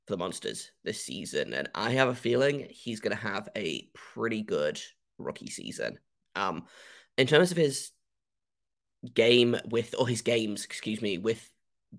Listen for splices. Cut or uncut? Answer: uncut